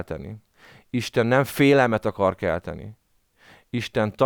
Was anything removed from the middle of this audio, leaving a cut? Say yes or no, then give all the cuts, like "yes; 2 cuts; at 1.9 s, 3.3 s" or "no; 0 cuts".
no; 0 cuts